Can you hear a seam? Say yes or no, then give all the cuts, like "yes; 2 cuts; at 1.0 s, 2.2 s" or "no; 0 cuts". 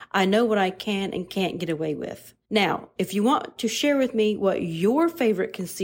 yes; 1 cut; at 2.4 s